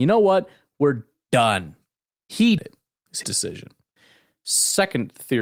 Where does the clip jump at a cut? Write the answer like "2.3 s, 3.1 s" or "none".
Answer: 2.6 s, 3.2 s